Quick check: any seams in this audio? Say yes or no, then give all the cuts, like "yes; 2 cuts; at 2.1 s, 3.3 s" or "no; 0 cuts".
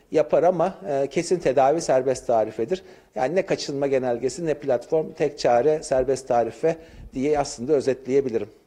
no; 0 cuts